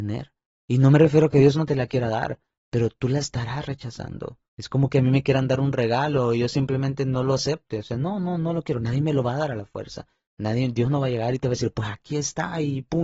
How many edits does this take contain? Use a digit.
1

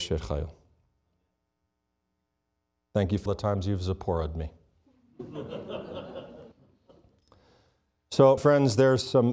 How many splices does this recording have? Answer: 3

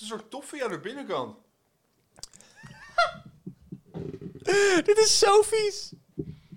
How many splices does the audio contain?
0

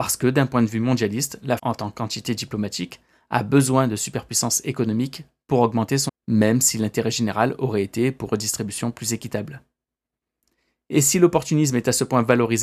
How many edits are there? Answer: 3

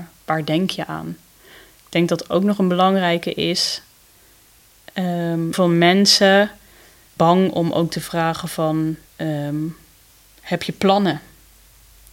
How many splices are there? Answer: 3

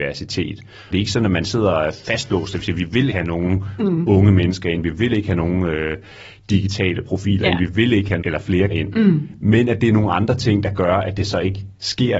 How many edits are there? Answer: 4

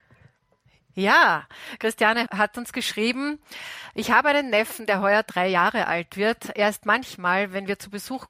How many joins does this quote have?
1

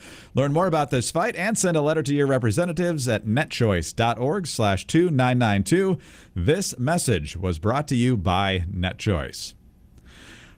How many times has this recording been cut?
0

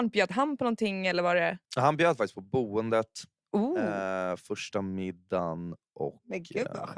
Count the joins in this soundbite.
1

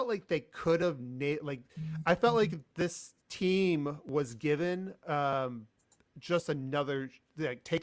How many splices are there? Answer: 0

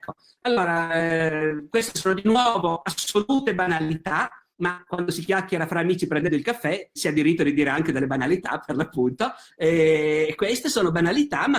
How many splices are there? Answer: 2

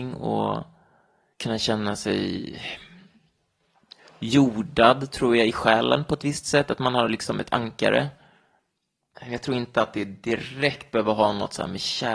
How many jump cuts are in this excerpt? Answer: 0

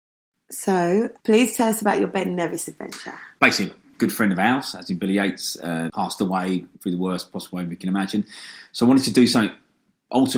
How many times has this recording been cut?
1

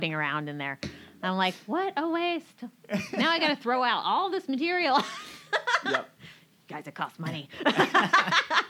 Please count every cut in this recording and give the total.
0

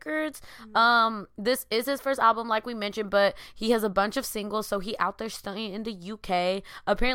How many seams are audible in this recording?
0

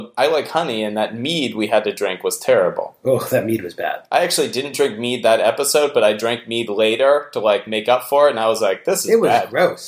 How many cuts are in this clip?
0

